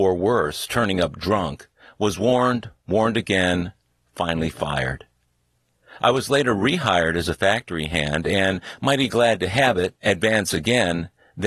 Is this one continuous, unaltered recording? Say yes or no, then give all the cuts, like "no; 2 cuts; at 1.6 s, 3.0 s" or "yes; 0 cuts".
yes; 0 cuts